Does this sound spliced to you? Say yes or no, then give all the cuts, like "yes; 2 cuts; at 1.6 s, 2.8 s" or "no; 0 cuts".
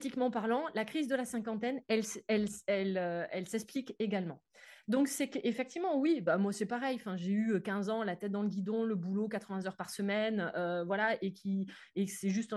no; 0 cuts